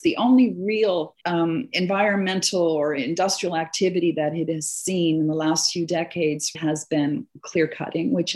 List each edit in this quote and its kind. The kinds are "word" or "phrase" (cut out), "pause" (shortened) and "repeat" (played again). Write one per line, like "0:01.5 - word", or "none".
0:01.2 - pause
0:06.5 - word